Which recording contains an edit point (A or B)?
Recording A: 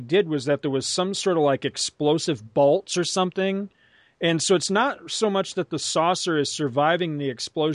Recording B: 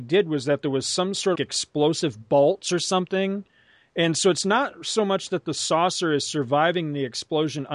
B